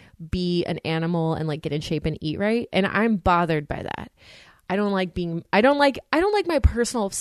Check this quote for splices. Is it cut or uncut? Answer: uncut